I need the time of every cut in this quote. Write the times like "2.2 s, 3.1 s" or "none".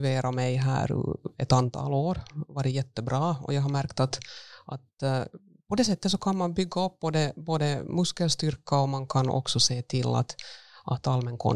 none